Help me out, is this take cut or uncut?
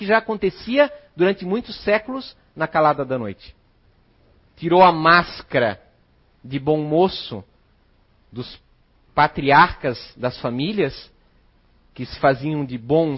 uncut